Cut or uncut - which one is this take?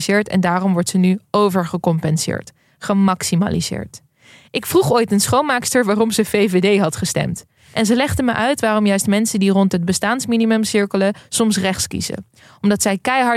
uncut